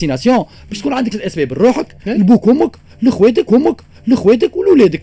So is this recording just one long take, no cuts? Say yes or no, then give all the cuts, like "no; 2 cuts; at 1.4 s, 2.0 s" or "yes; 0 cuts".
no; 3 cuts; at 1.1 s, 2.0 s, 3.5 s